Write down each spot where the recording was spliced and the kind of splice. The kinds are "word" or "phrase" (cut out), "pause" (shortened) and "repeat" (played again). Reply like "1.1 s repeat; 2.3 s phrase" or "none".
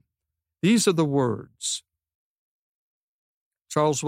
none